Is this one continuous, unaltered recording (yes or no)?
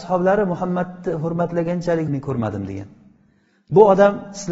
no